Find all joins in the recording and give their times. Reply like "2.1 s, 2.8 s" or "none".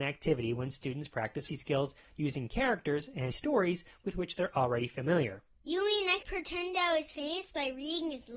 1.5 s, 3.3 s, 6.2 s